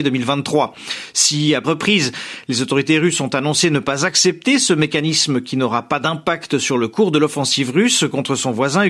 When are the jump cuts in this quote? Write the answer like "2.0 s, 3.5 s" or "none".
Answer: 1.6 s